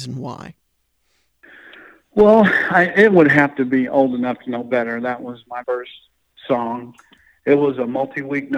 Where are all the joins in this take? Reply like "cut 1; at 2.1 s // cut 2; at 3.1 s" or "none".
cut 1; at 5.6 s